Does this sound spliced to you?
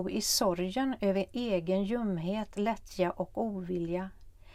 no; 0 cuts

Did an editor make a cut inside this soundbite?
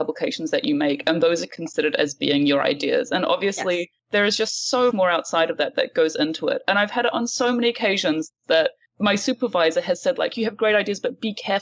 yes; 1 cut; at 4.9 s

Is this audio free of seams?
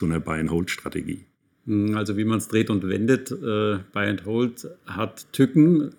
yes; 0 cuts

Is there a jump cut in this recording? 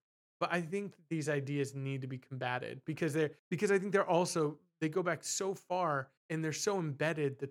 yes; 2 cuts; at 3.4 s, 6.2 s

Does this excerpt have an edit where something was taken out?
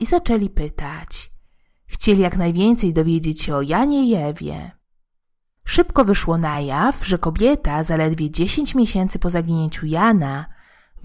no; 0 cuts

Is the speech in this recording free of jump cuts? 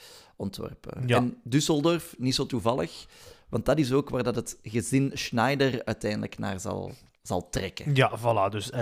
yes; 0 cuts

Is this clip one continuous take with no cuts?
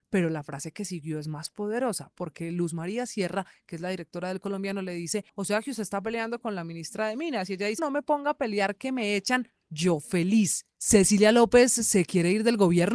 no; 2 cuts; at 5.3 s, 7.8 s

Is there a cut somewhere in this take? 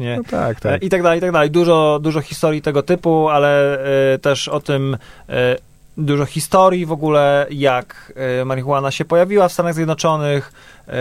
no; 0 cuts

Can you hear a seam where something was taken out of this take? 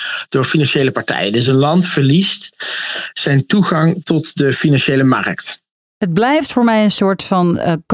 no; 0 cuts

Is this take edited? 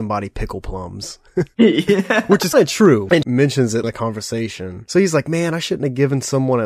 yes; 3 cuts; at 2.5 s, 3.2 s, 3.8 s

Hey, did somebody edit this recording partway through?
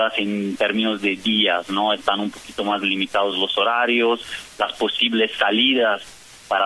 no; 0 cuts

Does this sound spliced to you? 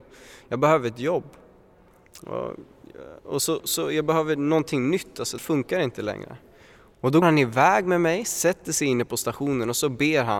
yes; 3 cuts; at 3.6 s, 5.4 s, 7.2 s

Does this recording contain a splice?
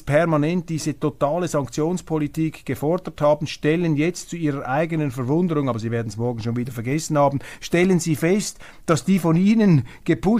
no; 0 cuts

